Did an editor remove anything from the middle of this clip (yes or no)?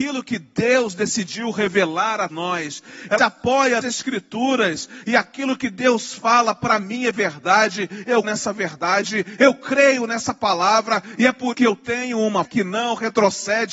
yes